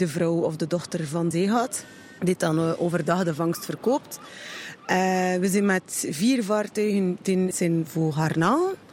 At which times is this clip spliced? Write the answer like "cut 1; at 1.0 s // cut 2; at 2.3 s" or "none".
cut 1; at 1.3 s // cut 2; at 7.5 s